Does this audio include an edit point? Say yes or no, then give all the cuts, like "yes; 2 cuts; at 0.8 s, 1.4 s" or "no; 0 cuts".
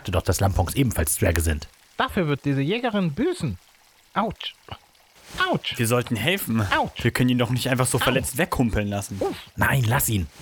no; 0 cuts